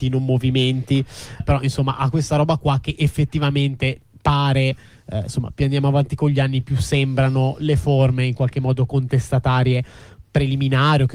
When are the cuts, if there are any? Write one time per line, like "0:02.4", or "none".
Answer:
0:01.4